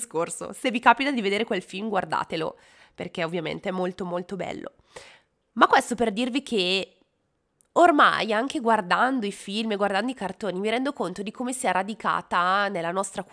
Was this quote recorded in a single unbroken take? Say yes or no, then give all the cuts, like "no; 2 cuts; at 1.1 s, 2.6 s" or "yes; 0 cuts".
yes; 0 cuts